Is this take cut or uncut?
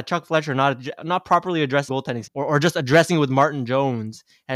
cut